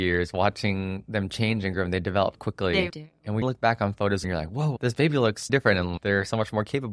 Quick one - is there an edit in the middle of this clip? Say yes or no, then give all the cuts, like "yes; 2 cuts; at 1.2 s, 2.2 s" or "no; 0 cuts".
yes; 5 cuts; at 2.3 s, 2.9 s, 3.4 s, 4.2 s, 5.5 s